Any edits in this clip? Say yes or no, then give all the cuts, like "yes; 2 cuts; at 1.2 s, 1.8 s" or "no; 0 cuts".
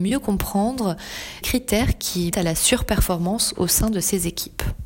yes; 2 cuts; at 1.4 s, 2.3 s